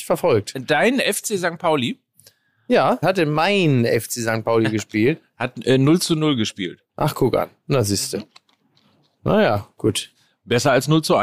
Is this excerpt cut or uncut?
cut